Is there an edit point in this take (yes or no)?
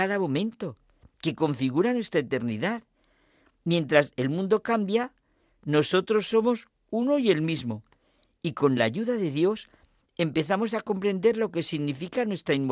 no